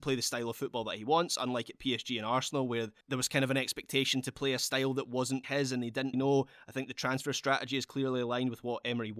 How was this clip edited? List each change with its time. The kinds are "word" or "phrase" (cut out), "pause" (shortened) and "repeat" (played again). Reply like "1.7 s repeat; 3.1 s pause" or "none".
3.0 s pause; 5.4 s word; 6.1 s word